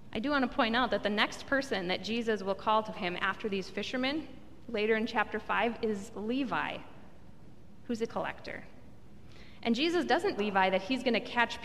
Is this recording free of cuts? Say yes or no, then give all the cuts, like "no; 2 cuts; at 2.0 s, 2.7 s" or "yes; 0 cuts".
no; 3 cuts; at 2.9 s, 8.1 s, 10.4 s